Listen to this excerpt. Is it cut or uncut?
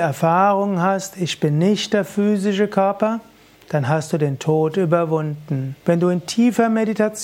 cut